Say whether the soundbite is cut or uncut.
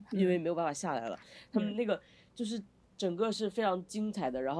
uncut